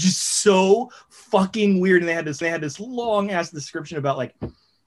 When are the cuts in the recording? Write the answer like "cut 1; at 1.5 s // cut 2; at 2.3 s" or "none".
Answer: cut 1; at 2.4 s